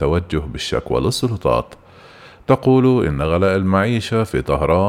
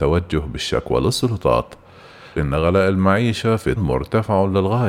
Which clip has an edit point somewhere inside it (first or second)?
second